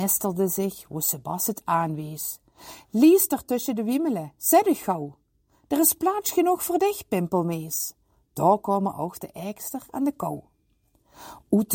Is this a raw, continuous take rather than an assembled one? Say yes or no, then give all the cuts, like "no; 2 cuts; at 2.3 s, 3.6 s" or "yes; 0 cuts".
yes; 0 cuts